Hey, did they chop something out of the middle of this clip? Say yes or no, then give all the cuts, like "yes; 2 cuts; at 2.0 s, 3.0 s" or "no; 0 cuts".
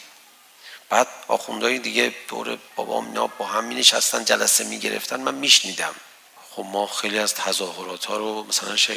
no; 0 cuts